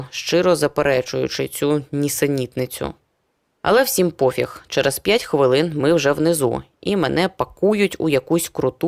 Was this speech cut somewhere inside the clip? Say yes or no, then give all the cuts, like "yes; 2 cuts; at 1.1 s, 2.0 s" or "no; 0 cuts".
no; 0 cuts